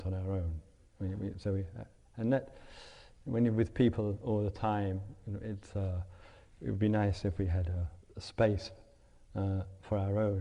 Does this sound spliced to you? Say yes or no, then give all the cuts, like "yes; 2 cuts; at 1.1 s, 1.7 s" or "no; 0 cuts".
no; 0 cuts